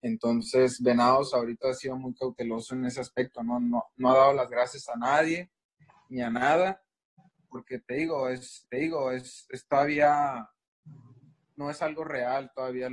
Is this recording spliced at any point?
yes; 1 cut; at 8.6 s

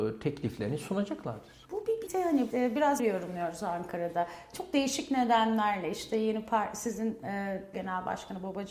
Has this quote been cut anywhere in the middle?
yes; 5 cuts; at 1.6 s, 2.1 s, 2.5 s, 3.0 s, 7.7 s

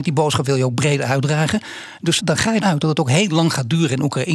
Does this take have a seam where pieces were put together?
yes; 2 cuts; at 2.2 s, 2.6 s

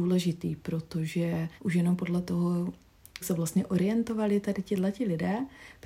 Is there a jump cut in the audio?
yes; 2 cuts; at 1.6 s, 3.2 s

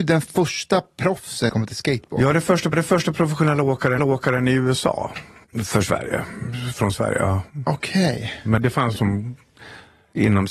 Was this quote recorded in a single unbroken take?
no; 6 cuts; at 1.5 s, 2.7 s, 4.0 s, 5.4 s, 8.6 s, 9.0 s

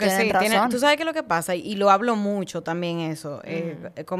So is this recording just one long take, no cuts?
yes; 0 cuts

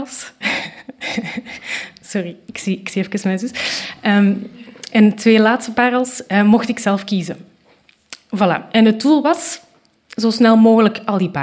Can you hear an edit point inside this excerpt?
no; 0 cuts

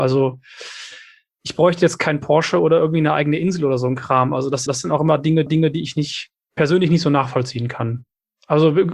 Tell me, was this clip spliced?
yes; 2 cuts; at 4.7 s, 5.5 s

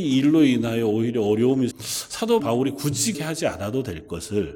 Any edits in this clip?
yes; 3 cuts; at 1.7 s, 2.4 s, 3.1 s

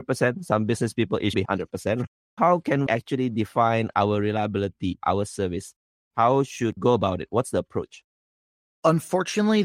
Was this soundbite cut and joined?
yes; 3 cuts; at 1.3 s, 2.9 s, 6.8 s

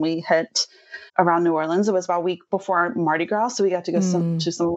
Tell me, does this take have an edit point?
yes; 1 cut; at 1.1 s

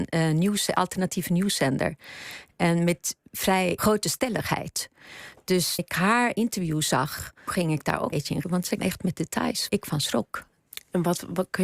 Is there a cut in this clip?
yes; 7 cuts; at 3.8 s, 5.8 s, 7.5 s, 8.1 s, 8.4 s, 8.8 s, 9.7 s

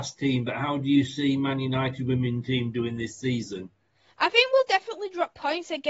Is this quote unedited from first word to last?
yes; 0 cuts

